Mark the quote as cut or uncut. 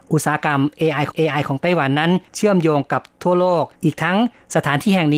cut